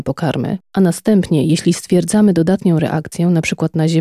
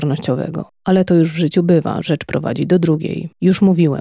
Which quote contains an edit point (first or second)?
second